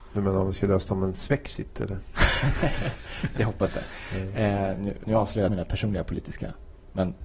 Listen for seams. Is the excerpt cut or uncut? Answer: cut